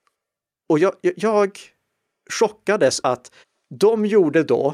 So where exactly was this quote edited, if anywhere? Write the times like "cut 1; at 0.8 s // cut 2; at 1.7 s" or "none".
cut 1; at 1.1 s // cut 2; at 3.0 s // cut 3; at 3.4 s